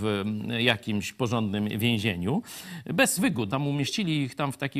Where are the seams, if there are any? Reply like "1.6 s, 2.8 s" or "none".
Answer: 3.2 s, 3.5 s